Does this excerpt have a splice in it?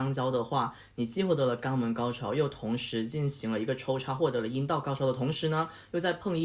no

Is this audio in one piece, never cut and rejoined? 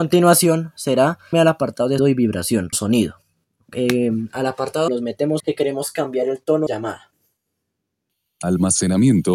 no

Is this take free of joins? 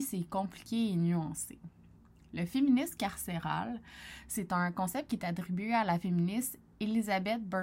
yes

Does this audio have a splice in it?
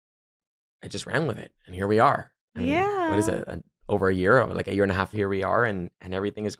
yes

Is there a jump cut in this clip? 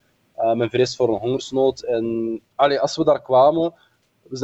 yes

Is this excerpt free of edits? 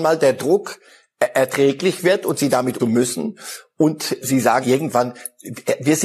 no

